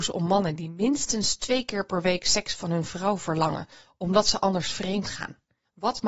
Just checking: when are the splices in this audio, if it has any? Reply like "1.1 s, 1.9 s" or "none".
none